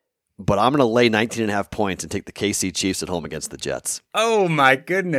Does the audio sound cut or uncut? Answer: uncut